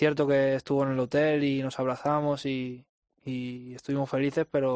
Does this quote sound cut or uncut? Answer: uncut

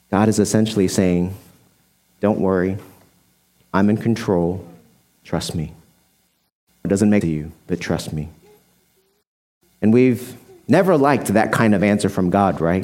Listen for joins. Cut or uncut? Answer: cut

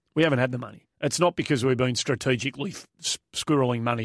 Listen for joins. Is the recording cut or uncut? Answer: cut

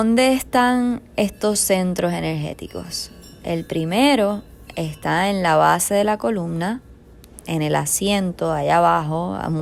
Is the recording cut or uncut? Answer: uncut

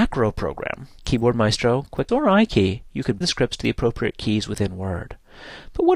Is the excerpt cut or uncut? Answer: cut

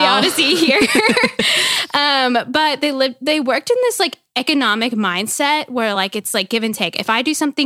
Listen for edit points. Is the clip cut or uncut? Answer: uncut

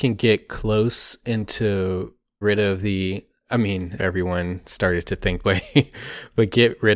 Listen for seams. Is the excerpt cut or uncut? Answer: cut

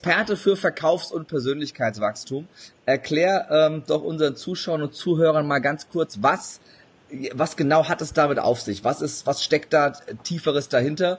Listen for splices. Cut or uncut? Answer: uncut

